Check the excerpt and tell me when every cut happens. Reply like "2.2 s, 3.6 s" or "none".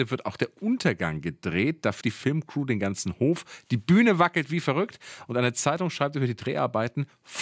2.0 s